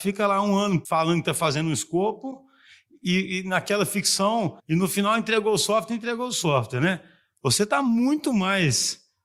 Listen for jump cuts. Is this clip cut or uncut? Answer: cut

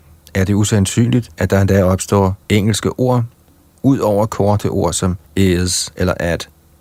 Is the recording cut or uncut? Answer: cut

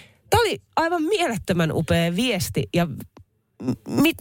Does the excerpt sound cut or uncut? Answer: uncut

